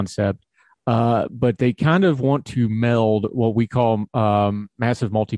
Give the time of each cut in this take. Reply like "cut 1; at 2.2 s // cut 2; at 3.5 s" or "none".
none

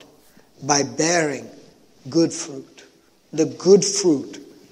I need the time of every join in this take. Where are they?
none

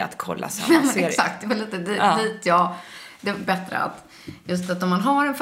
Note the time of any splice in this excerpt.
cut 1; at 3.5 s

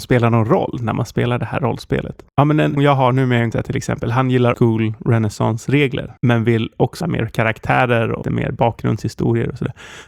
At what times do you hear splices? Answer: cut 1; at 2.3 s // cut 2; at 2.8 s // cut 3; at 3.5 s // cut 4; at 4.5 s // cut 5; at 6.2 s // cut 6; at 7.0 s // cut 7; at 8.2 s

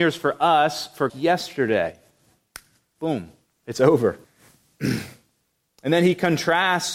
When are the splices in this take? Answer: cut 1; at 1.1 s // cut 2; at 4.2 s

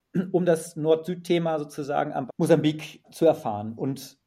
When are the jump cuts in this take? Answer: cut 1; at 2.3 s // cut 2; at 3.0 s

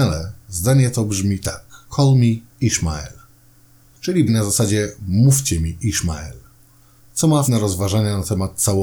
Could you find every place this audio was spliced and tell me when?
cut 1; at 1.8 s // cut 2; at 4.3 s // cut 3; at 7.5 s

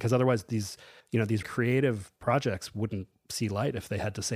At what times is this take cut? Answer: cut 1; at 1.4 s

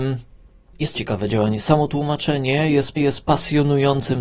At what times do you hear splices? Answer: cut 1; at 1.0 s // cut 2; at 3.0 s

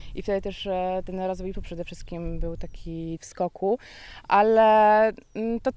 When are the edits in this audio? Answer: cut 1; at 1.5 s // cut 2; at 3.2 s

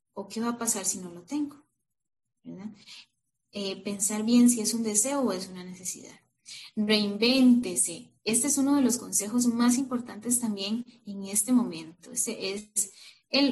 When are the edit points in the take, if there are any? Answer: cut 1; at 8.2 s

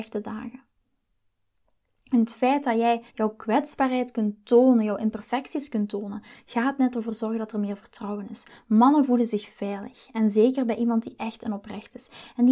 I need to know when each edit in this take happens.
cut 1; at 3.1 s

